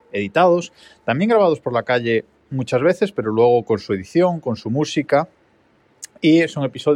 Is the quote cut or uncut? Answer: uncut